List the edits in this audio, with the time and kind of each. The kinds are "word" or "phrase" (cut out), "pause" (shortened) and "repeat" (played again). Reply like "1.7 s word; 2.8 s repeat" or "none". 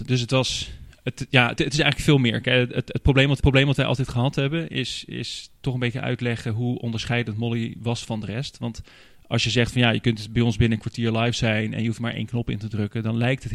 1.6 s word; 3.4 s repeat